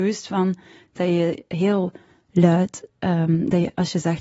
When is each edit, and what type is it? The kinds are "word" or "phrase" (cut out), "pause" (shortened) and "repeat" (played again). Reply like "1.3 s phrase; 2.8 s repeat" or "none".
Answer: none